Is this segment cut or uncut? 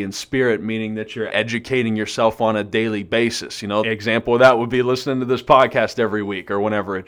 cut